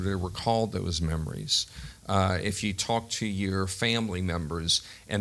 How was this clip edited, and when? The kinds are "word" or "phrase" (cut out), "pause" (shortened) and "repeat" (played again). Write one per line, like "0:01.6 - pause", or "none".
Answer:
none